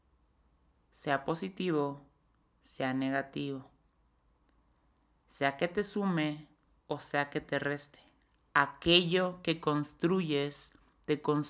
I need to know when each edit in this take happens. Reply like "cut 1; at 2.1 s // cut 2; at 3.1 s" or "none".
none